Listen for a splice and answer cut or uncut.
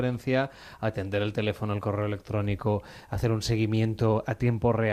uncut